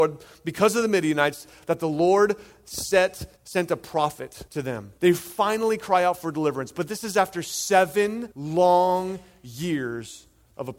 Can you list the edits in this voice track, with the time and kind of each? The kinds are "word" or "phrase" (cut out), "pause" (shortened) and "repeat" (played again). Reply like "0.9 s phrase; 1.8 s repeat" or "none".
3.4 s pause; 4.5 s pause; 5.0 s pause; 8.3 s pause

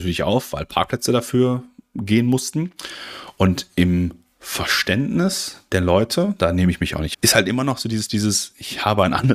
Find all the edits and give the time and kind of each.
7.1 s word

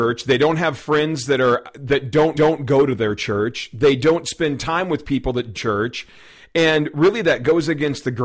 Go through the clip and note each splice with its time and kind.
2.3 s repeat; 5.5 s phrase

